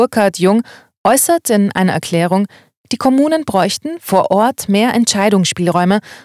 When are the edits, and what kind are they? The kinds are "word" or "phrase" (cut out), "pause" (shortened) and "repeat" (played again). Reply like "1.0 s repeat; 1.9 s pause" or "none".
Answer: none